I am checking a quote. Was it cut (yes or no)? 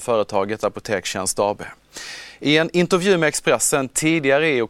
no